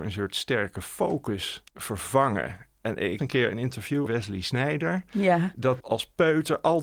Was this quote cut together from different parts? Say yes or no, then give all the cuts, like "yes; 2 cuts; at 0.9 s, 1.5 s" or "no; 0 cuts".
yes; 4 cuts; at 1.7 s, 3.2 s, 4.1 s, 5.8 s